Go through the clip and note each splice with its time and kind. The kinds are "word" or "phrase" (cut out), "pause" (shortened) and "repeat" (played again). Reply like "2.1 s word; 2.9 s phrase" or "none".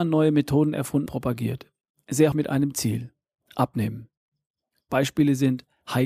1.1 s word; 2.3 s word